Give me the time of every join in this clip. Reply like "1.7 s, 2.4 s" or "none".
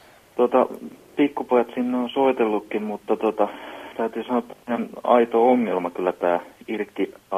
none